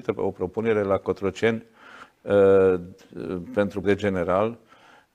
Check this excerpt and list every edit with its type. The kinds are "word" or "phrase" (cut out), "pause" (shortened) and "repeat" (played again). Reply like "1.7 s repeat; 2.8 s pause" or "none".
3.8 s word